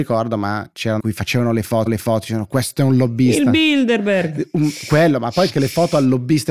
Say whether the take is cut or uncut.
cut